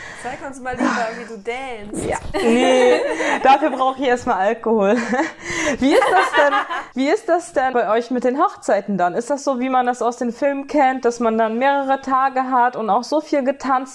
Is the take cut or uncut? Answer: cut